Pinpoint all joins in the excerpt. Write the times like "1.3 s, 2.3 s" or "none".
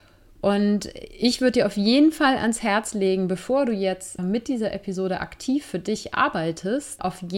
4.2 s